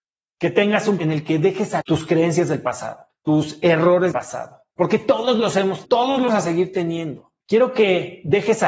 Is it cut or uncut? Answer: cut